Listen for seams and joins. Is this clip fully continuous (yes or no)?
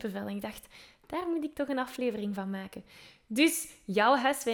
yes